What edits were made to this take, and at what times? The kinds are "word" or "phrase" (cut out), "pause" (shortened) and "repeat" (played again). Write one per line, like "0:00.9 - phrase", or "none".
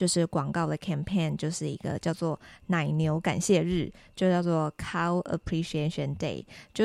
none